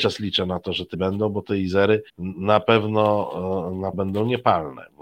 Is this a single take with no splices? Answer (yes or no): no